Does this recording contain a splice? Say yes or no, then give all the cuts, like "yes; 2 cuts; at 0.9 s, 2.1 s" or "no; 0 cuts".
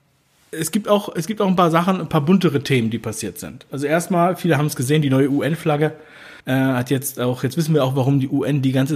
yes; 1 cut; at 6.4 s